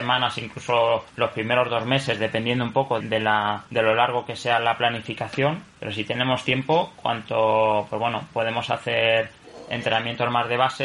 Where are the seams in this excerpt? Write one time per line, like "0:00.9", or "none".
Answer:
0:01.1
0:03.0
0:03.7
0:05.7